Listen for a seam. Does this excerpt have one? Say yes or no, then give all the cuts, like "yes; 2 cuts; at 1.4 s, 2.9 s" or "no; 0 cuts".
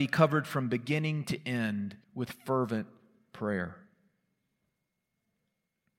yes; 1 cut; at 2.0 s